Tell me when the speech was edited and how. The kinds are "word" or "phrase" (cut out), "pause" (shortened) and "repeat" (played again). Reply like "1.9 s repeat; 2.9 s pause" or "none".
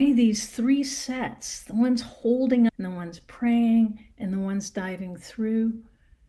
2.7 s word